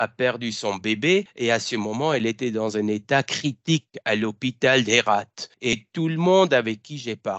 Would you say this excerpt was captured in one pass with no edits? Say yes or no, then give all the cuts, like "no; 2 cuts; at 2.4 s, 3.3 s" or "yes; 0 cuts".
yes; 0 cuts